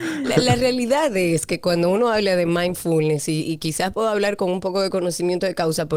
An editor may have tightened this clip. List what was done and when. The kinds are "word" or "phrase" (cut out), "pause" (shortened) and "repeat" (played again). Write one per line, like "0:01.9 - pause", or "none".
none